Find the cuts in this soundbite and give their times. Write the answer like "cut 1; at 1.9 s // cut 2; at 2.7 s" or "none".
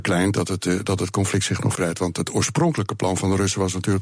cut 1; at 1.7 s